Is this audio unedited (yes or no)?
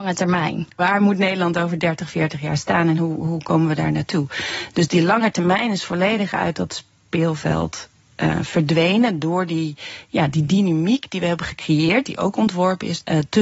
yes